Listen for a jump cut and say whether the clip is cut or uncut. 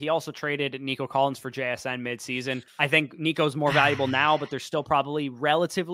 cut